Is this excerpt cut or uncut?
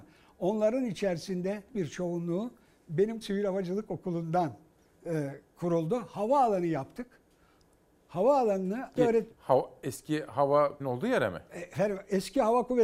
cut